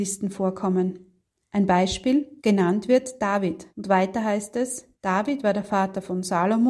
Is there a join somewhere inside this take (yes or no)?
yes